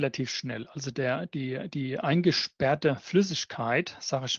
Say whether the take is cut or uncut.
uncut